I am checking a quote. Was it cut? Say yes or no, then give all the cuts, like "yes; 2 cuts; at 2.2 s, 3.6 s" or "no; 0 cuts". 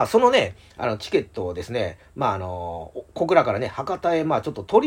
no; 0 cuts